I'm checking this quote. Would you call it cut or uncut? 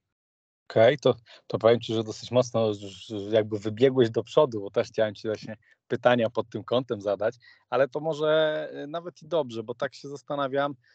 uncut